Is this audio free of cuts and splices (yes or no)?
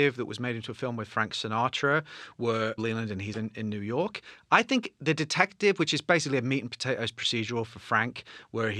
no